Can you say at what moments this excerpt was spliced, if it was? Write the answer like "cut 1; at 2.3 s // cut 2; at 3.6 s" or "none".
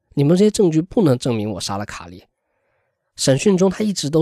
none